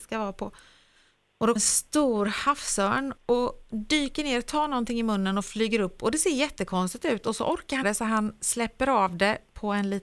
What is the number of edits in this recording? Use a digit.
3